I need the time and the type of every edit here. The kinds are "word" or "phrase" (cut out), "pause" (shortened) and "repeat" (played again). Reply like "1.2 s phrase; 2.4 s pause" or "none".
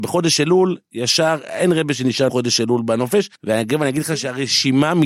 2.3 s word; 3.4 s pause